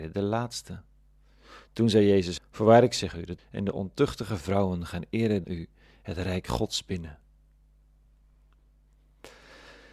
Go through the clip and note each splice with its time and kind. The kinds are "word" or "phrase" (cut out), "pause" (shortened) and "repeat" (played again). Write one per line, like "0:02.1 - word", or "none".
0:02.4 - word
0:03.4 - word
0:05.4 - word